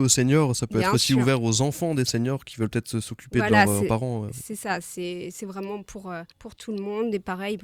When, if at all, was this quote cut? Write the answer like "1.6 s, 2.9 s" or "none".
6.3 s